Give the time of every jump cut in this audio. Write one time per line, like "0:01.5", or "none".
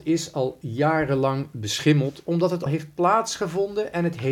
0:02.7